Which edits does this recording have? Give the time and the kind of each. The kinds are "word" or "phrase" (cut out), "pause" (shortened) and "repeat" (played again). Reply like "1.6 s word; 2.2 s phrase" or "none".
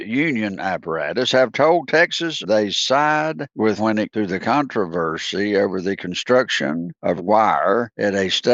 2.4 s phrase; 3.8 s word; 4.1 s word; 7.2 s word